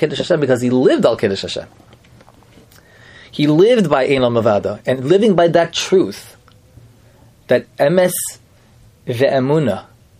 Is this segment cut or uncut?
uncut